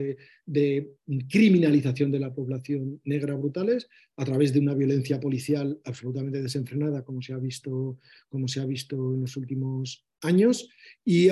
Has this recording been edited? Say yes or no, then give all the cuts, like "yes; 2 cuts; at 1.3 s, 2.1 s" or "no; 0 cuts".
no; 0 cuts